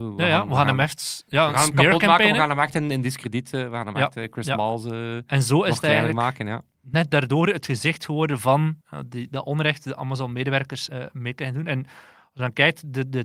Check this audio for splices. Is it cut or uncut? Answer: cut